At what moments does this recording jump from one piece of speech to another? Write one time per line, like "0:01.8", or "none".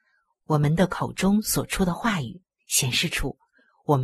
0:02.6

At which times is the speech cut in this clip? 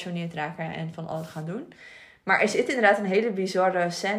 none

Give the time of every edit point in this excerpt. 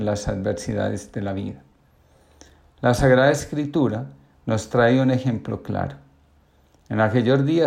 none

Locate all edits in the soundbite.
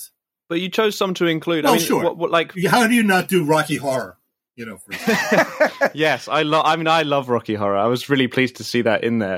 none

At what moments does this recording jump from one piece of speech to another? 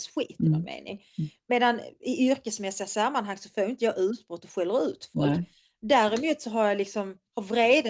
none

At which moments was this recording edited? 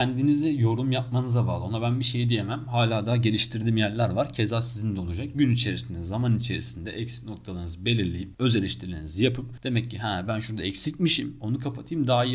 none

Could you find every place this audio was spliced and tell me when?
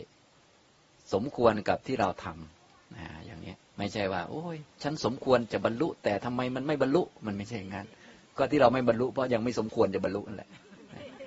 0:03.6
0:04.7

